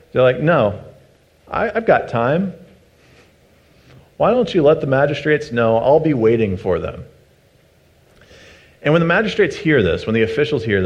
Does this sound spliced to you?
no; 0 cuts

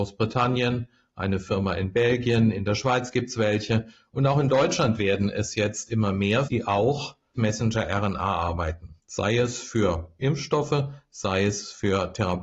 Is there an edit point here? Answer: yes; 3 cuts; at 6.4 s, 7.3 s, 9.0 s

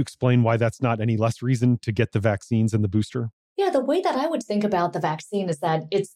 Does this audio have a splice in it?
yes; 1 cut; at 3.4 s

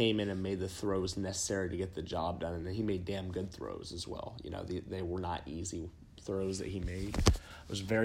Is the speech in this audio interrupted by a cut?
no; 0 cuts

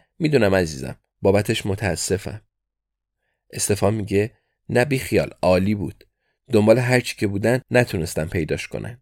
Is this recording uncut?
yes; 0 cuts

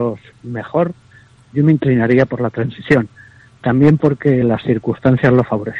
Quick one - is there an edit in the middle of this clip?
no; 0 cuts

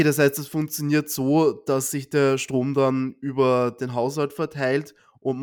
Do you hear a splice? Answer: no; 0 cuts

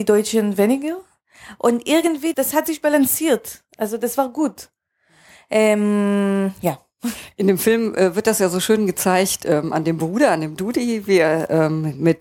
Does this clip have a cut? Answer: yes; 1 cut; at 2.3 s

